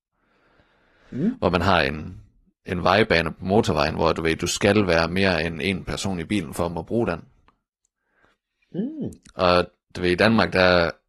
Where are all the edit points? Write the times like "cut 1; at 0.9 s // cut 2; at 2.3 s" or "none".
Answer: none